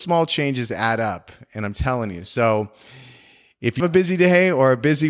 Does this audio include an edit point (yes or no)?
yes